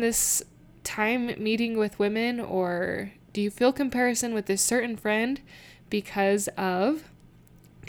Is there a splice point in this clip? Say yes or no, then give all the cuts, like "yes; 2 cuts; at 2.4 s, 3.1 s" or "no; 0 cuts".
no; 0 cuts